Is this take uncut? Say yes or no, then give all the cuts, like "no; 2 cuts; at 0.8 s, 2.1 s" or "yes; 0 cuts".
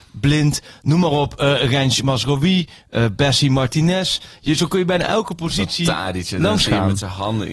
yes; 0 cuts